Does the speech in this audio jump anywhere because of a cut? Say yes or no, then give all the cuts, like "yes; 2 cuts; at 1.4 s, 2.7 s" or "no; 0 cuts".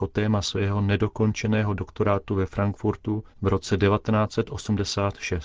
yes; 1 cut; at 3.3 s